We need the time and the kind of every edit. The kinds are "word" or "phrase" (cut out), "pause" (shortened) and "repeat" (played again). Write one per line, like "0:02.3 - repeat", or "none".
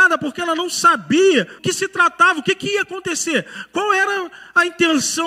0:01.6 - word